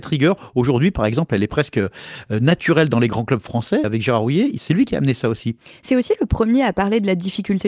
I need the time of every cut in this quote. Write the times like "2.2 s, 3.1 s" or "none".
3.8 s